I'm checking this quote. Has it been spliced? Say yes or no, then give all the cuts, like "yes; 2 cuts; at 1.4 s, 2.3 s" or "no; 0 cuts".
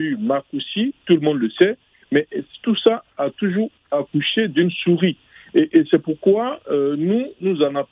no; 0 cuts